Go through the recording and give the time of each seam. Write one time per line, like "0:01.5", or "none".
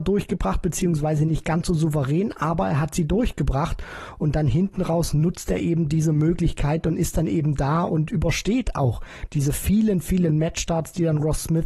none